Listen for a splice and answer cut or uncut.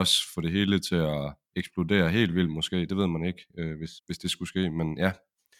cut